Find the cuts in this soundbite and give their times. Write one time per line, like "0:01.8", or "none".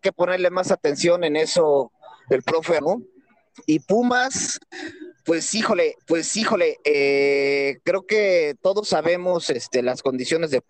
0:02.8
0:06.0